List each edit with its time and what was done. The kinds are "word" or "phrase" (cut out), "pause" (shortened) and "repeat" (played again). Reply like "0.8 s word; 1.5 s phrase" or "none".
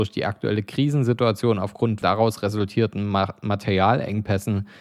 2.0 s phrase